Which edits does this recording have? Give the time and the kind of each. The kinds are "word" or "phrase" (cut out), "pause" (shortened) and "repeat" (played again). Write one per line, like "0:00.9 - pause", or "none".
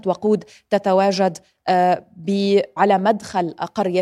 0:02.8 - word